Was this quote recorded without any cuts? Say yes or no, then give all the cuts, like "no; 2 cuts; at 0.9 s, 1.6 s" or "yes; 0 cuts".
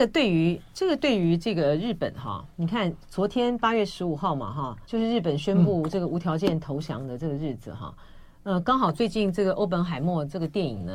no; 2 cuts; at 2.5 s, 4.8 s